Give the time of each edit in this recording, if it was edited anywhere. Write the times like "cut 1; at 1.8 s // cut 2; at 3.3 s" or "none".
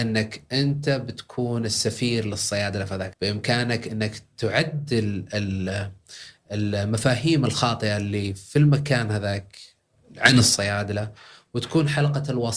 cut 1; at 3.1 s